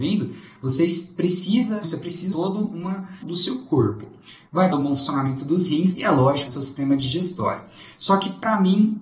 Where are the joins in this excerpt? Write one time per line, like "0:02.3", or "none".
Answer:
0:01.8
0:02.3
0:03.2
0:04.7
0:05.9
0:06.5